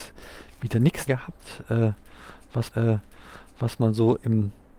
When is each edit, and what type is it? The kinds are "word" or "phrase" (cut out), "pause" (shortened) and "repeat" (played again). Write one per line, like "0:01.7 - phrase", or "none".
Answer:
0:01.1 - word
0:02.7 - repeat